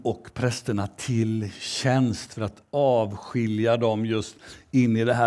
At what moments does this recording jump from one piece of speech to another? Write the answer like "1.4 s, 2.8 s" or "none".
none